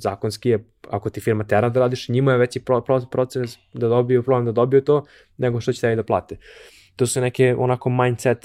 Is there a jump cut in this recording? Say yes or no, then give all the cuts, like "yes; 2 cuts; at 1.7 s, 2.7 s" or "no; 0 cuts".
no; 0 cuts